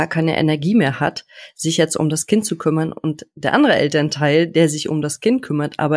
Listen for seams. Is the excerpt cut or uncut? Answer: uncut